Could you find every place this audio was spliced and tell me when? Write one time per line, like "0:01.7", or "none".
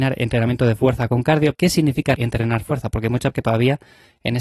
0:01.5
0:02.2
0:03.3